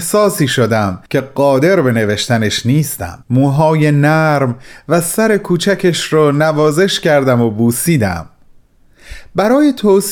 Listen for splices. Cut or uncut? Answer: cut